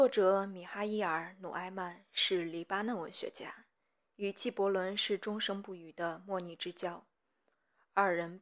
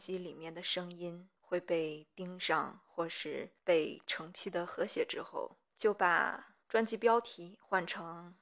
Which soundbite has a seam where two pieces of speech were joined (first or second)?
second